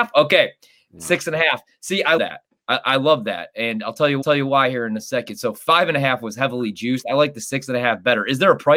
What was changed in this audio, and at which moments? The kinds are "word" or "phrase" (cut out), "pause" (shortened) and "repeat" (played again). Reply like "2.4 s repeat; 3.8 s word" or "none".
2.2 s word; 4.2 s repeat